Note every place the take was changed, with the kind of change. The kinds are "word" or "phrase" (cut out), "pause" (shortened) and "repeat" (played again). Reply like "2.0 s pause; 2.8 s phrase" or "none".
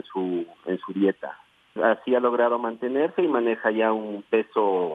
1.8 s word